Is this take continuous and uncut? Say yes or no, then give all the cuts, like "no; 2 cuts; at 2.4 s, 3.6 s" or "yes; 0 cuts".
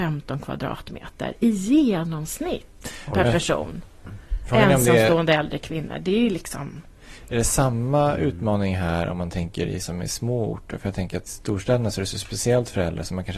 no; 2 cuts; at 9.8 s, 11.3 s